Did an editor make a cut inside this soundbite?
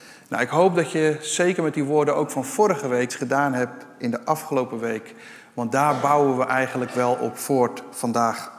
yes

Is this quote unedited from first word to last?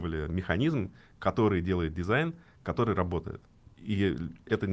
yes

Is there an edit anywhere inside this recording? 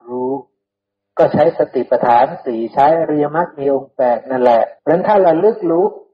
yes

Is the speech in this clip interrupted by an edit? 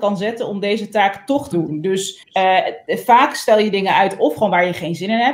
yes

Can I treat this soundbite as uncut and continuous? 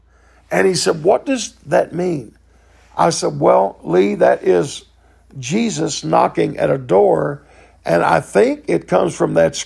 yes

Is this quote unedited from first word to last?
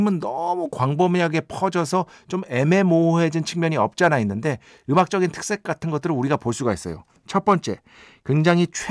yes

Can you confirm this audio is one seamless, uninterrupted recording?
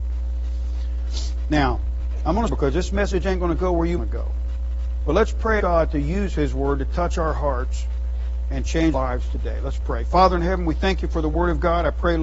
no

